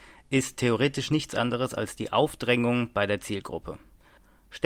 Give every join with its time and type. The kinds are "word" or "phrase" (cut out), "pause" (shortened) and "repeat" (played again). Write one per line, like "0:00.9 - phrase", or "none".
none

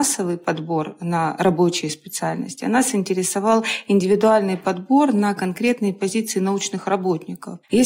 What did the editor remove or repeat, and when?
none

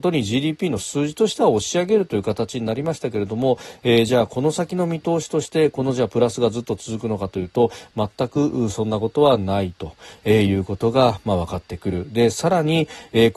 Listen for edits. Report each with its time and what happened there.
none

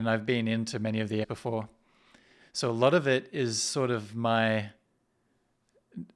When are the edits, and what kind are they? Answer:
0:01.2 - word

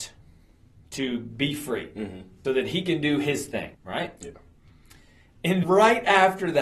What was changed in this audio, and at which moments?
0:02.4 - word
0:03.7 - pause
0:05.6 - word

